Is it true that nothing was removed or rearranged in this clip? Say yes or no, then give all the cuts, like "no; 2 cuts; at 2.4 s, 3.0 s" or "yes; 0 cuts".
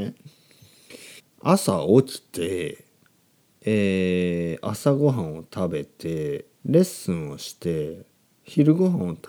no; 2 cuts; at 1.2 s, 6.5 s